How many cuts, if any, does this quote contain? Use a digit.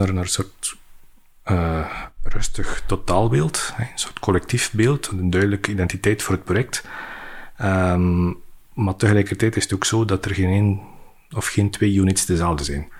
0